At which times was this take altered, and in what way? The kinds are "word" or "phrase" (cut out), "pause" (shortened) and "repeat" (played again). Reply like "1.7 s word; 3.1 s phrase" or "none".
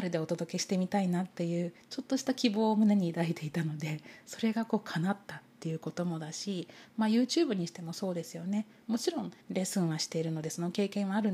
9.4 s pause